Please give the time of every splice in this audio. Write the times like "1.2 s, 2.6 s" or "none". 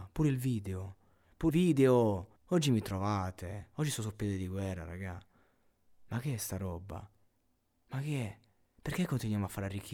1.5 s, 2.4 s